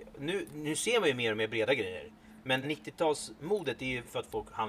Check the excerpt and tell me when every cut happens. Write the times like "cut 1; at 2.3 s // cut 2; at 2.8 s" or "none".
cut 1; at 2.6 s